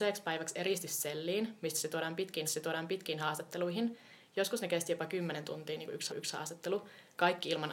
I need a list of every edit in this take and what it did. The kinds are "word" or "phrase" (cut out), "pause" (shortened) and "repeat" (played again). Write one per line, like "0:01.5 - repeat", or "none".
0:02.4 - repeat
0:06.1 - repeat